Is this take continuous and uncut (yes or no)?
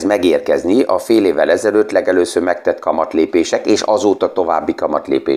yes